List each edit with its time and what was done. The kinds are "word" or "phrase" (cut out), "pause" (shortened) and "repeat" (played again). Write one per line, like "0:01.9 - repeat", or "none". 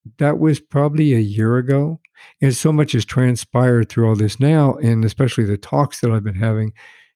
none

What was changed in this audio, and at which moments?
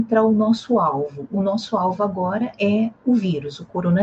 none

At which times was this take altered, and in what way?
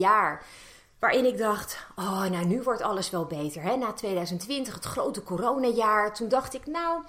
none

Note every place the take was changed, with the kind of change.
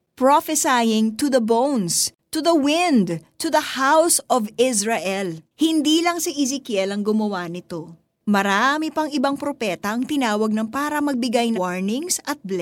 0:05.5 - pause
0:10.7 - word
0:11.5 - word

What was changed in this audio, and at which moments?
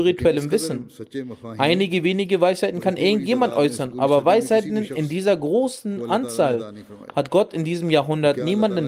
none

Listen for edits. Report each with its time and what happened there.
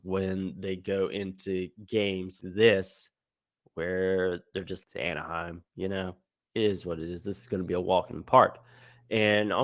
0:02.4 - word
0:04.8 - phrase
0:05.7 - pause

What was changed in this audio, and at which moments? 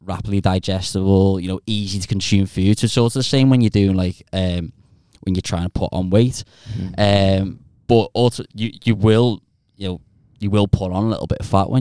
none

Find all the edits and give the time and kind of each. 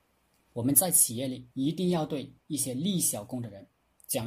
0:01.5 - pause
0:02.4 - pause

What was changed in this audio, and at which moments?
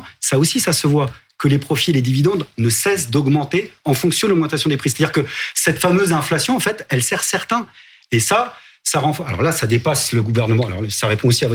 none

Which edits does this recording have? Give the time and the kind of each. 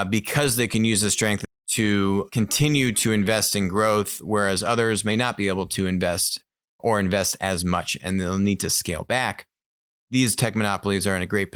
0:01.4 - phrase
0:02.3 - word
0:06.8 - word

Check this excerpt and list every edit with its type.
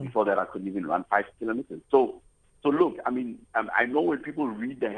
none

